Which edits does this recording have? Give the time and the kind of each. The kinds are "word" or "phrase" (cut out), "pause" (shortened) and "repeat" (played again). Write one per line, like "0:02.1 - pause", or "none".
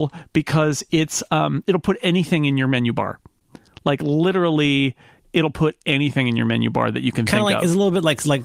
none